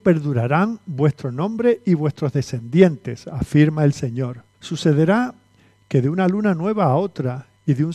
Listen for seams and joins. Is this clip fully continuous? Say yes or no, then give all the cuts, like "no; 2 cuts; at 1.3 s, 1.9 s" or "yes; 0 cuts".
no; 1 cut; at 4.5 s